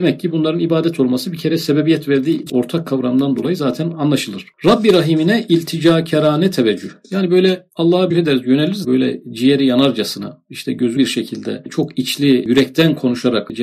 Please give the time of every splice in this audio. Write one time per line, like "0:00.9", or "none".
0:02.5
0:08.1
0:08.8
0:11.0